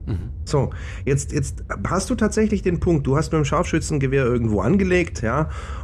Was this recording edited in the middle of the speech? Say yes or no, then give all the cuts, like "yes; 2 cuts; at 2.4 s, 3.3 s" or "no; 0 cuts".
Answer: no; 0 cuts